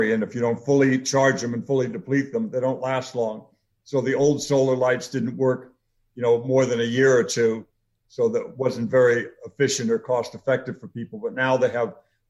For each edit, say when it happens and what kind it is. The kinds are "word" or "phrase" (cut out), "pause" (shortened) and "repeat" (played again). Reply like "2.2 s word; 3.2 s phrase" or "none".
none